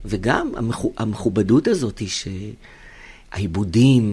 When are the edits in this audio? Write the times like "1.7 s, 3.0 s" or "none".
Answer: none